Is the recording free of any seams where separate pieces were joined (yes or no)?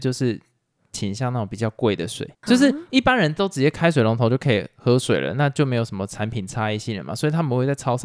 no